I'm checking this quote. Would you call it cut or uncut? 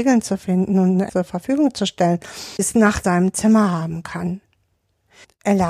cut